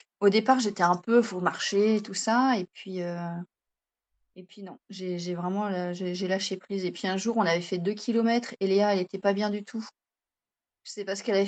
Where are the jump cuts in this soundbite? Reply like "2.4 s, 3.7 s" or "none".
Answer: none